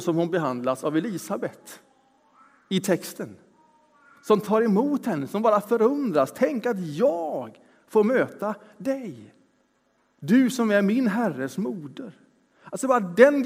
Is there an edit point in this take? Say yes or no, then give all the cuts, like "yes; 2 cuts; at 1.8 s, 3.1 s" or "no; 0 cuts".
no; 0 cuts